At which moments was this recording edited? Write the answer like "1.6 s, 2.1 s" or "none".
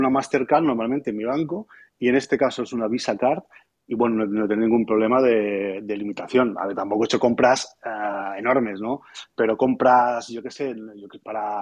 none